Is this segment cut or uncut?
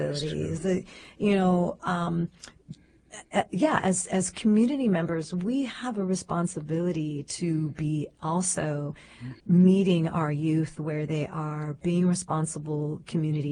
cut